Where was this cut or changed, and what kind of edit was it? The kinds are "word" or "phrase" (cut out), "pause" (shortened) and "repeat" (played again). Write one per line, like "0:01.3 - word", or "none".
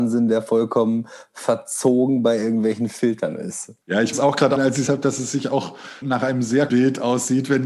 0:03.8 - pause
0:04.1 - word
0:04.6 - word
0:04.9 - word
0:06.0 - word
0:06.7 - word